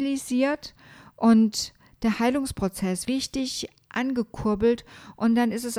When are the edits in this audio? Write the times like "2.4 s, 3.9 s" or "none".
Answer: 3.0 s

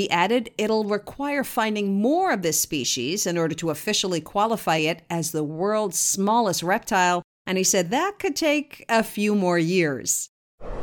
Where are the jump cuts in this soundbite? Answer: none

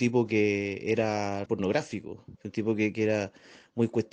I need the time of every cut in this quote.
1.5 s, 2.4 s, 2.9 s

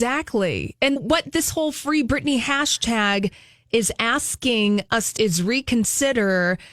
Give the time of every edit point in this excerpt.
1.0 s, 5.2 s

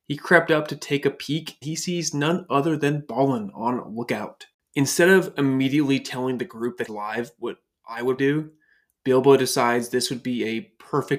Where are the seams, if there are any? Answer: 1.6 s, 6.9 s, 8.2 s

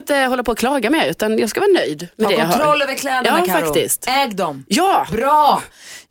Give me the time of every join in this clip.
none

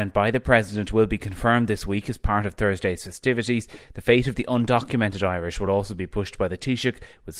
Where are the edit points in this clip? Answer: none

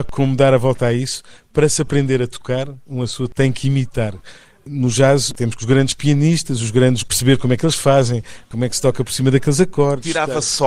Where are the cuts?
5.6 s, 7.0 s

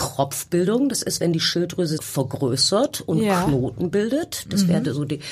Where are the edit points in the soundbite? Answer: 2.0 s

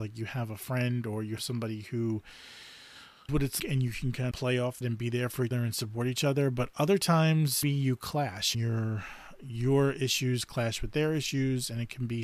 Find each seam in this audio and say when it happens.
1.4 s, 3.3 s, 3.6 s, 4.3 s, 4.8 s, 5.5 s, 7.6 s, 8.5 s

